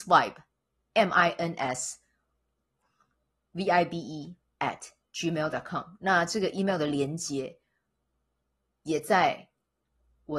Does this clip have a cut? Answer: no; 0 cuts

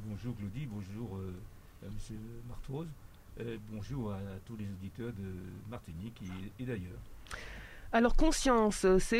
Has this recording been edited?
no; 0 cuts

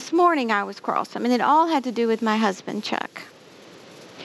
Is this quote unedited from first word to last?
yes; 0 cuts

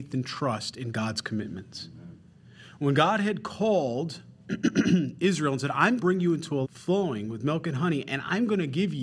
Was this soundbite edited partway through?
yes; 2 cuts; at 6.0 s, 6.6 s

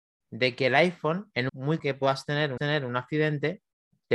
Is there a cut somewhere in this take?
yes; 3 cuts; at 1.5 s, 1.8 s, 2.6 s

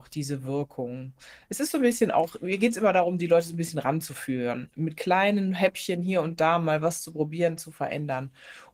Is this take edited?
no; 0 cuts

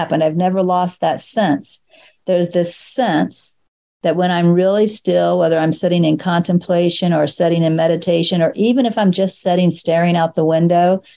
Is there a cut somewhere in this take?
no; 0 cuts

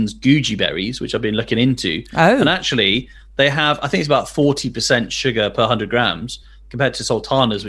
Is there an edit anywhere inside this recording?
no; 0 cuts

